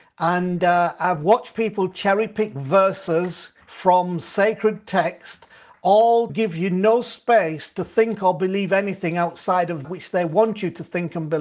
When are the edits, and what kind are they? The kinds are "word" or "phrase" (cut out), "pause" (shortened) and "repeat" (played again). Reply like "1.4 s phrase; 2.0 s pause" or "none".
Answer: 3.6 s pause; 6.3 s word; 9.8 s word